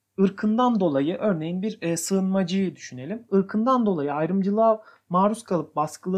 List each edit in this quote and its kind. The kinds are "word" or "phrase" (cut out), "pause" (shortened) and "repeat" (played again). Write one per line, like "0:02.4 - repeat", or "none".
none